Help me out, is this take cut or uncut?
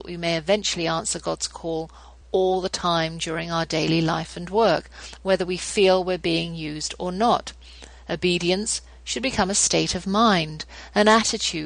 uncut